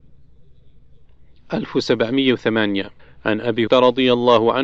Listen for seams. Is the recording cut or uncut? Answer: cut